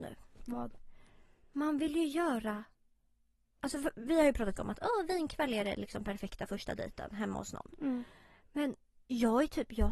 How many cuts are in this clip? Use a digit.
1